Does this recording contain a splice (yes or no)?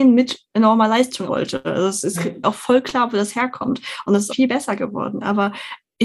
yes